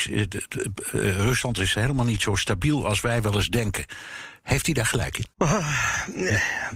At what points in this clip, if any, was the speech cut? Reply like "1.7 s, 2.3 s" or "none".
5.3 s